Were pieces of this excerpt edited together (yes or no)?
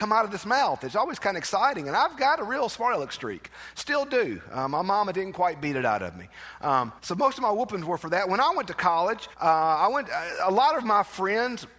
yes